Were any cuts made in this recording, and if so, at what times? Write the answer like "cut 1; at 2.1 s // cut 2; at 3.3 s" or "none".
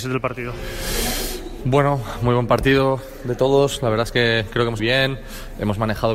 cut 1; at 4.8 s